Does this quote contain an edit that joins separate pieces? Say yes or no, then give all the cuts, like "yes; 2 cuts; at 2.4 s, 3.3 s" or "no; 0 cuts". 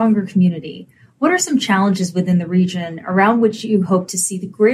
no; 0 cuts